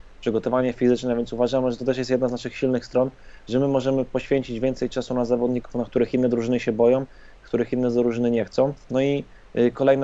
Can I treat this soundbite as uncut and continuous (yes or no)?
no